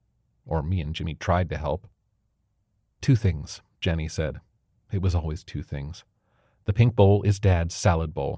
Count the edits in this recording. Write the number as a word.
zero